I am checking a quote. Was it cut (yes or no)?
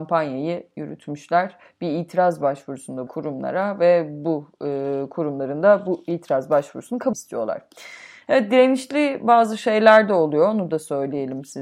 yes